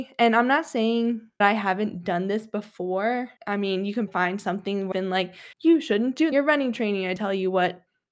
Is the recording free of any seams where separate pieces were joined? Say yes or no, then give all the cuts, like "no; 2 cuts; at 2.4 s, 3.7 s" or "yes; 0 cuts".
no; 7 cuts; at 1.4 s, 3.4 s, 4.1 s, 4.9 s, 5.5 s, 6.3 s, 7.2 s